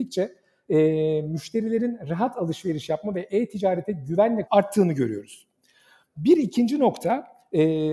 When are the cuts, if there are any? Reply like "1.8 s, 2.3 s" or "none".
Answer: 4.5 s